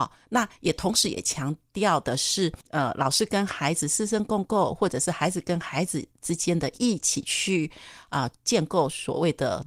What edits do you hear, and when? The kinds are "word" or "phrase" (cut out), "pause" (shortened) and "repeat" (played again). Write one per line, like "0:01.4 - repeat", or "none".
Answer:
0:02.6 - pause